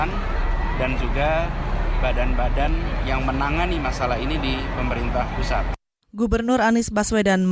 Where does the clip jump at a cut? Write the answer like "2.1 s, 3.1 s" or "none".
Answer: none